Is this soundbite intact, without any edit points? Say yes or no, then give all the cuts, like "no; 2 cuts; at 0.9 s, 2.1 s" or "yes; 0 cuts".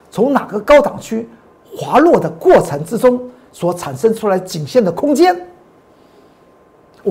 yes; 0 cuts